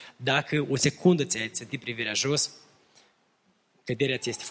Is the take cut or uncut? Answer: uncut